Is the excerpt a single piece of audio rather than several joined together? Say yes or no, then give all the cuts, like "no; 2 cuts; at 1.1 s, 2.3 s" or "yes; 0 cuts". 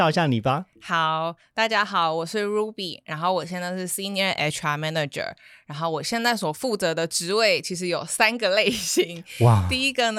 yes; 0 cuts